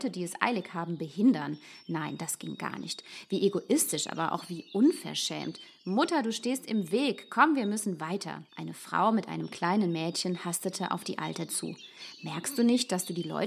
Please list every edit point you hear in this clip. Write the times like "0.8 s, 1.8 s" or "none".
8.5 s, 11.5 s